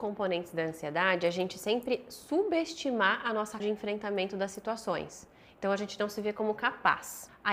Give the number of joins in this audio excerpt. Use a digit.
1